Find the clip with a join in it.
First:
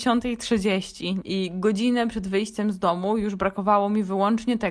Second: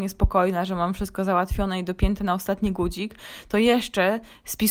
first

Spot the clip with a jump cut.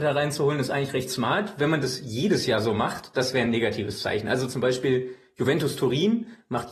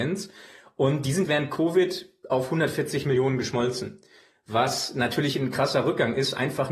second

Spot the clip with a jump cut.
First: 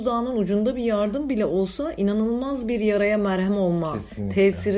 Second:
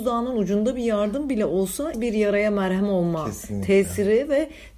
second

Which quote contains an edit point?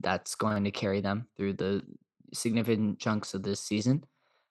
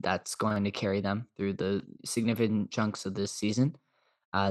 second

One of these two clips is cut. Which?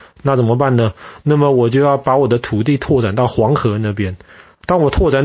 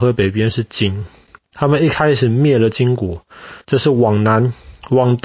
second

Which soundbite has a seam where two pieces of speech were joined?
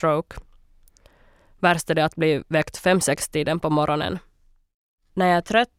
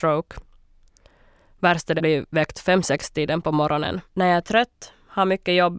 second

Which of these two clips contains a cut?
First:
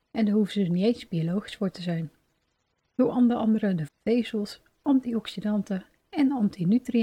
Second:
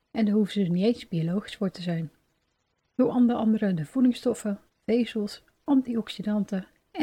first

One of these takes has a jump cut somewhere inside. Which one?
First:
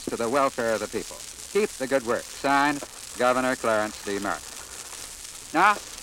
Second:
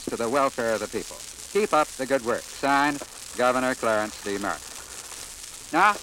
first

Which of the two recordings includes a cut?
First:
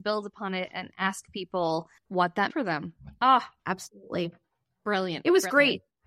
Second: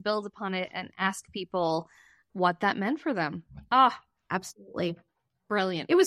first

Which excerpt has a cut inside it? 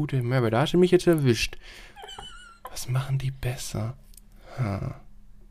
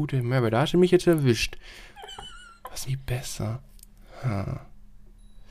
second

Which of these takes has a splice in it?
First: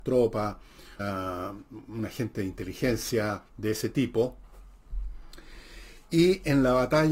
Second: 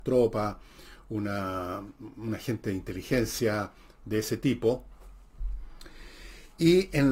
first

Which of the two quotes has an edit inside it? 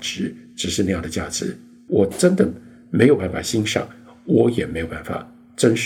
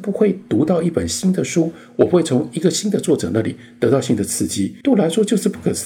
second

